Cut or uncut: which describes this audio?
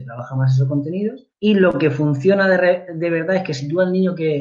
cut